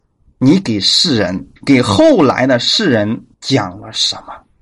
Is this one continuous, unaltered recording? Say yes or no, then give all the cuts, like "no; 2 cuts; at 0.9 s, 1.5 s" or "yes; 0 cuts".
no; 2 cuts; at 1.6 s, 3.3 s